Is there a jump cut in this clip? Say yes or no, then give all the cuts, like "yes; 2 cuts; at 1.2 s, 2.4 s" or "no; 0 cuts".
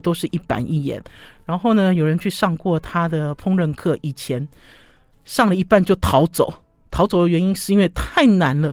no; 0 cuts